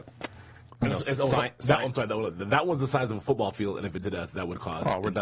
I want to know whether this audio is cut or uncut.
cut